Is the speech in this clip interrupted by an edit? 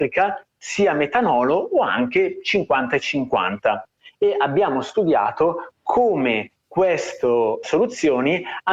yes; 1 cut; at 7.6 s

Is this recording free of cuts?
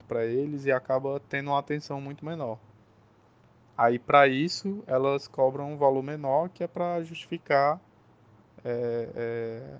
yes; 0 cuts

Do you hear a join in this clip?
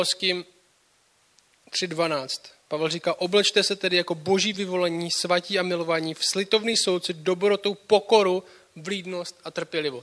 no; 0 cuts

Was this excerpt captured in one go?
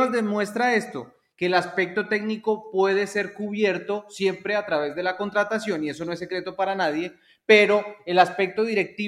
yes; 0 cuts

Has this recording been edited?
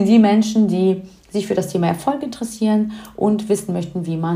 no; 0 cuts

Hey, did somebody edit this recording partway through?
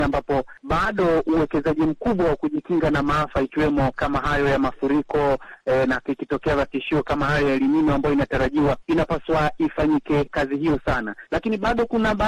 no; 0 cuts

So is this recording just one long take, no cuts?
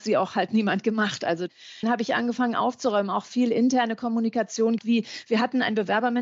no; 2 cuts; at 1.8 s, 4.8 s

